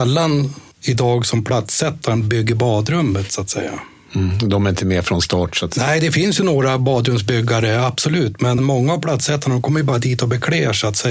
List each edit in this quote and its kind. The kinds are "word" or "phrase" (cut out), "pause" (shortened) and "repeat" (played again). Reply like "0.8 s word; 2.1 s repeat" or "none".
8.6 s word